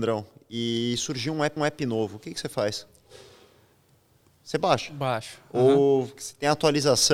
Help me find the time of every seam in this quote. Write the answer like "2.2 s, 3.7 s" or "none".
1.6 s